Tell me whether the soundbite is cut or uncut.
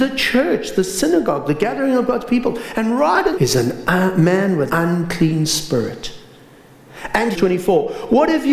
cut